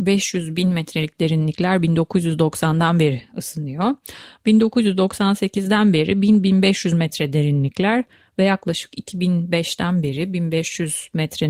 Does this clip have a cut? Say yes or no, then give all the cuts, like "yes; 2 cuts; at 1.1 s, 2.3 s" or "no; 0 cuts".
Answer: no; 0 cuts